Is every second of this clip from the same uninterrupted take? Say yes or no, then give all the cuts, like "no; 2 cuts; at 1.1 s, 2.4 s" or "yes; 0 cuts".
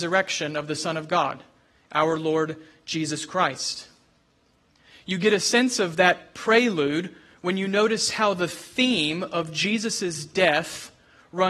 yes; 0 cuts